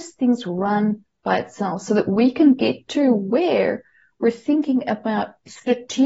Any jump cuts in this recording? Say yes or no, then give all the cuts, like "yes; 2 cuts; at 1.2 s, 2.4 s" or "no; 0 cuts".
no; 0 cuts